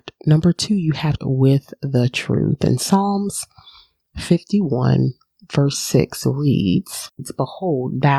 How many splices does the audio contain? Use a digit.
1